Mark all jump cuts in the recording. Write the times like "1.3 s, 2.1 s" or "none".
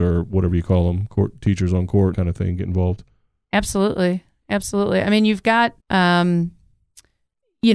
2.1 s, 5.8 s